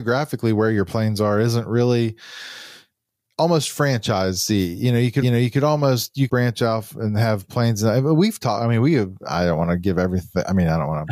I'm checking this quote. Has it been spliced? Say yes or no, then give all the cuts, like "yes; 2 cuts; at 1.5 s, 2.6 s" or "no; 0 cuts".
yes; 3 cuts; at 2.9 s, 5.2 s, 6.3 s